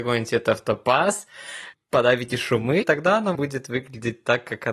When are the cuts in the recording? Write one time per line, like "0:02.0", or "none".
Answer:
0:01.7
0:02.8
0:03.3